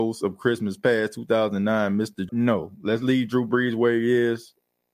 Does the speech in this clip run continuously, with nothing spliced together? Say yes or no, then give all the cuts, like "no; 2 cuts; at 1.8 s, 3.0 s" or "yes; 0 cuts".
no; 1 cut; at 2.3 s